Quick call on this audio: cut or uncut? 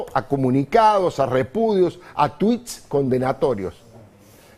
uncut